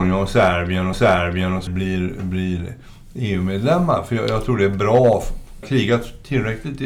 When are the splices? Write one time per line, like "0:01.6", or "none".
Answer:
0:00.9
0:01.7
0:05.6